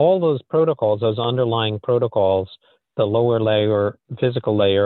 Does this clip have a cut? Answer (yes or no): no